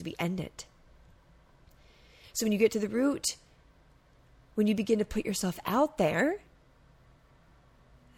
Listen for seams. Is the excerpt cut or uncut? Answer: uncut